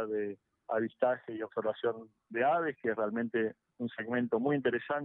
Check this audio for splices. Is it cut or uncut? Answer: uncut